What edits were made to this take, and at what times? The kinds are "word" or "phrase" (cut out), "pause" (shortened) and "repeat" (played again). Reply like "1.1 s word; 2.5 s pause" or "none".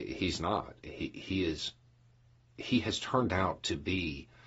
none